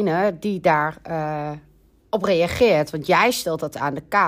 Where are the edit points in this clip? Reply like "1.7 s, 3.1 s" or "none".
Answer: none